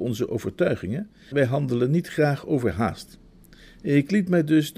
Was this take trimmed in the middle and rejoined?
yes; 1 cut; at 1.3 s

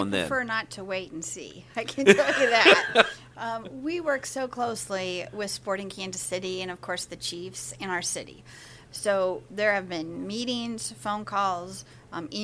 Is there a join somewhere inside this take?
no; 0 cuts

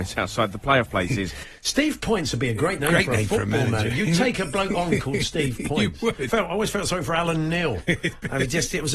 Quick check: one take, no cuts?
no; 1 cut; at 6.3 s

